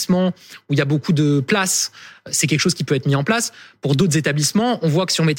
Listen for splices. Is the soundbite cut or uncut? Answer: uncut